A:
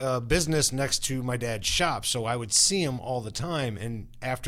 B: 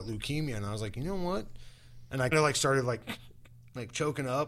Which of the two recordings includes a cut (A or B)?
B